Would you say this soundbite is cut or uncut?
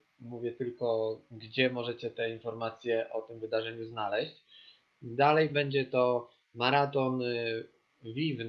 uncut